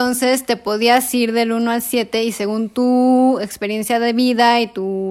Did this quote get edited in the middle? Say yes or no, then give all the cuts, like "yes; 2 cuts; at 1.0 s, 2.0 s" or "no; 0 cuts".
no; 0 cuts